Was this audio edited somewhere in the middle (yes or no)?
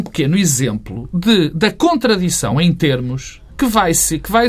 no